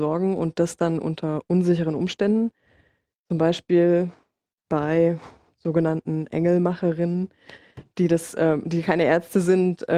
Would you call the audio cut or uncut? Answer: uncut